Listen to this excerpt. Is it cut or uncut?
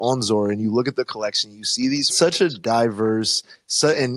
cut